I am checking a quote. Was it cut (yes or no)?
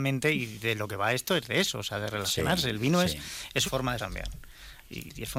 yes